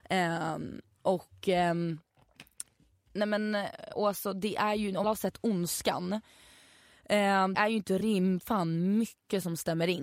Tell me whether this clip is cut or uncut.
cut